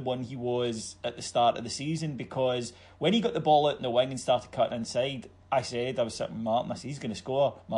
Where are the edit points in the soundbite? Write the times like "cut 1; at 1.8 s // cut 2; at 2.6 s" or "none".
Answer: none